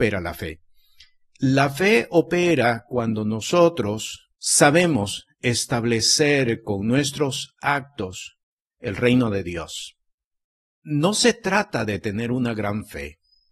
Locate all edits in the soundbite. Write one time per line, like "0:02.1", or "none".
0:04.3
0:10.2